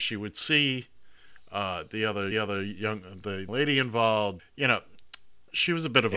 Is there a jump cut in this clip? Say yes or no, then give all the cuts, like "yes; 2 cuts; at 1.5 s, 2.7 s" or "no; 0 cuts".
yes; 3 cuts; at 2.3 s, 3.5 s, 4.4 s